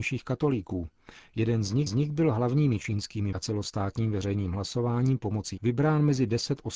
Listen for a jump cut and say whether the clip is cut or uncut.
cut